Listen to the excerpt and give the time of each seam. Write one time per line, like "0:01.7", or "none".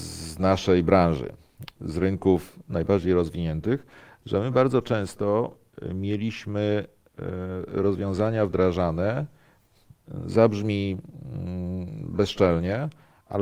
none

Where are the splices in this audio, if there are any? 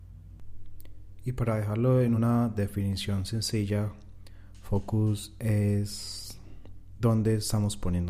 none

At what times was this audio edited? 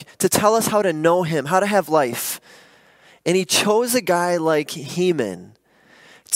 none

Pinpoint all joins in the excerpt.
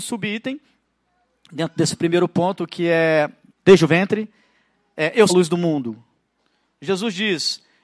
0:03.5
0:05.3

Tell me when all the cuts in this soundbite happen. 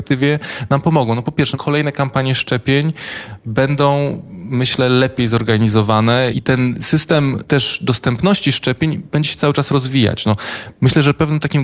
none

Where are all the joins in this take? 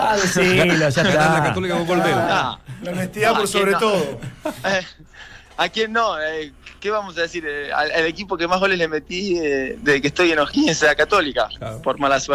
none

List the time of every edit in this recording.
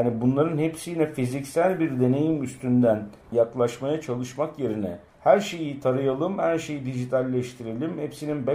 0:03.2
0:05.1

